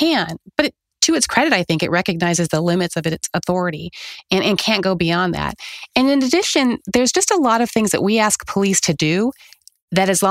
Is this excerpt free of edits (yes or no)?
yes